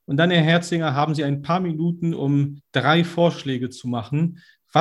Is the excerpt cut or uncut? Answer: uncut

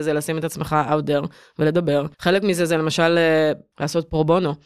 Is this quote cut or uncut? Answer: cut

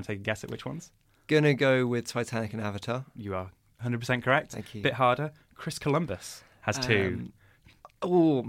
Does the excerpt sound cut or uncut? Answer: uncut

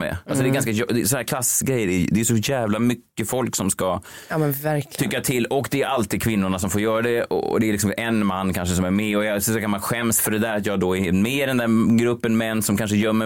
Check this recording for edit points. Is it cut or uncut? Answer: uncut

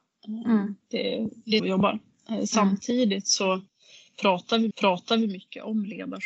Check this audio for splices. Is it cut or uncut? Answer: cut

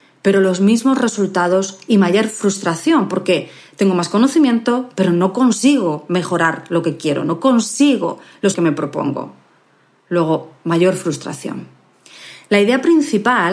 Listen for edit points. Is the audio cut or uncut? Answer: cut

